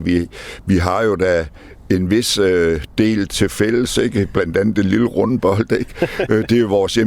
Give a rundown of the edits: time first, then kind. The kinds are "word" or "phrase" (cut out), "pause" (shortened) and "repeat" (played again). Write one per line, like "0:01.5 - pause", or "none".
none